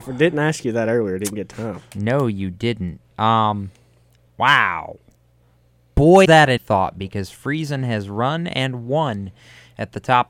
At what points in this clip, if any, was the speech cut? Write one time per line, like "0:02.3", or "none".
0:06.2
0:06.6